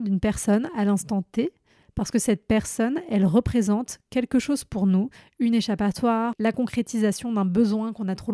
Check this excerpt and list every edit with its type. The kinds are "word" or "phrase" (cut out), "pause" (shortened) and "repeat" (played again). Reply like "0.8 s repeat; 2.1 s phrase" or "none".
none